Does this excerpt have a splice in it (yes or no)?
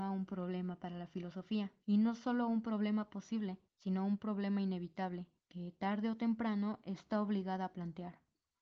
yes